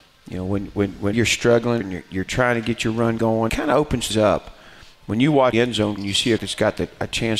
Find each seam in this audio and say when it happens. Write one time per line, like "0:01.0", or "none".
0:01.1
0:01.8
0:03.2
0:03.5
0:04.1
0:05.5
0:06.0
0:06.4